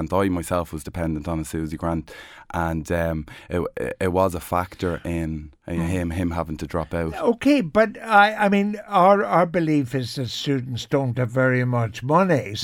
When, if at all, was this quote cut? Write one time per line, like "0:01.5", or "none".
0:05.6